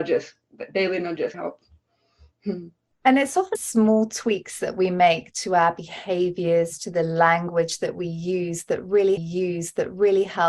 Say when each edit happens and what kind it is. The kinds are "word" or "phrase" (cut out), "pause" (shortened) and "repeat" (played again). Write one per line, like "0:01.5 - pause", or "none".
0:01.3 - phrase
0:03.5 - phrase
0:09.2 - repeat